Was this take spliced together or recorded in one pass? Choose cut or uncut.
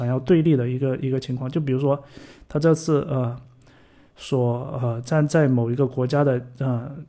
uncut